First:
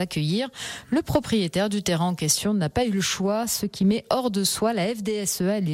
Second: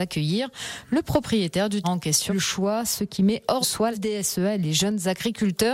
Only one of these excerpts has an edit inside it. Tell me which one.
second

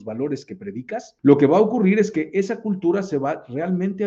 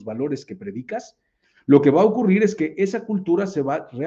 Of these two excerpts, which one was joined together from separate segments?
first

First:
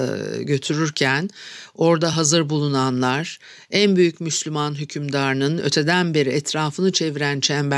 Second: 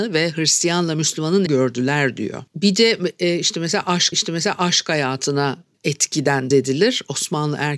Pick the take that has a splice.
second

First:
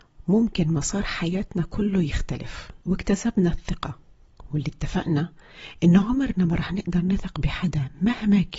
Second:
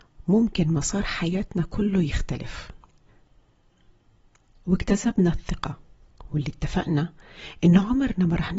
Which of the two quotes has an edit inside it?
first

